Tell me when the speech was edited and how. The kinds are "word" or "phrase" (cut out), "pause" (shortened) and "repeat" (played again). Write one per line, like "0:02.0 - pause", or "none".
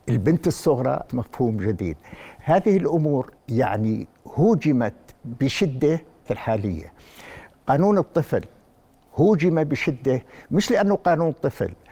0:01.1 - word
0:03.4 - pause
0:06.3 - phrase